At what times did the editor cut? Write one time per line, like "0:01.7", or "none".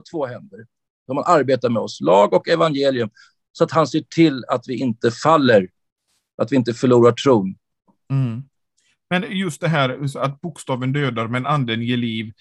0:08.7